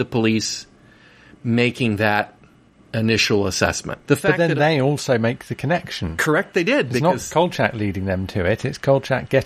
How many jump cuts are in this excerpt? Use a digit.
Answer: 1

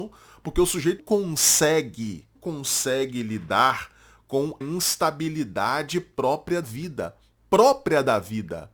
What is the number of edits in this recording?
4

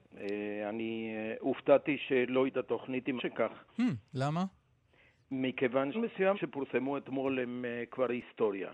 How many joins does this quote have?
5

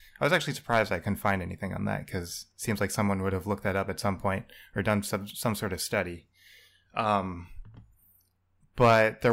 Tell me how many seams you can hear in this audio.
0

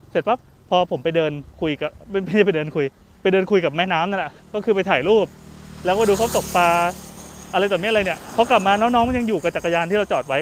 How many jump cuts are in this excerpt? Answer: 0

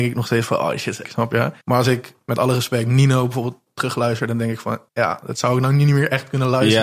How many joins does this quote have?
3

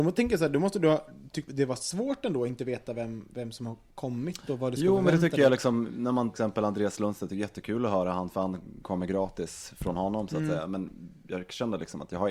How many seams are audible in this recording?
3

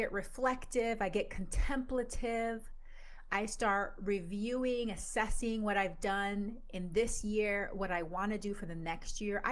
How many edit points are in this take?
0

